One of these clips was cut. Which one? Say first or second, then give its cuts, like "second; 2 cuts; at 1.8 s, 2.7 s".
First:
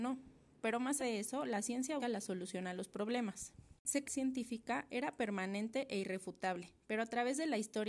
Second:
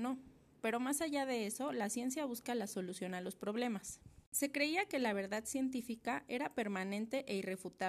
first; 3 cuts; at 1.0 s, 2.0 s, 4.0 s